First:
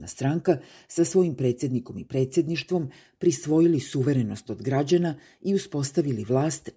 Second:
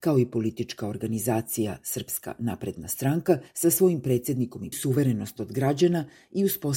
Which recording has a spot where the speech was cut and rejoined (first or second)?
second